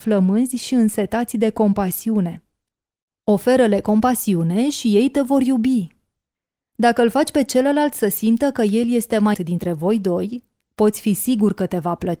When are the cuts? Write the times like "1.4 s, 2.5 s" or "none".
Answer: 9.3 s